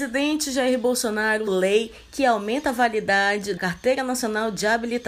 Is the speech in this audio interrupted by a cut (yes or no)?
yes